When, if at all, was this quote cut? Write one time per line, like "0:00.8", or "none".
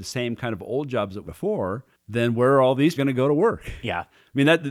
0:01.3
0:01.9
0:03.0